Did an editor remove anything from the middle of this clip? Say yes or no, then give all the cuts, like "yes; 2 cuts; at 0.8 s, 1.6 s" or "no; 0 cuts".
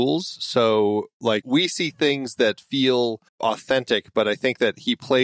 yes; 2 cuts; at 1.4 s, 3.3 s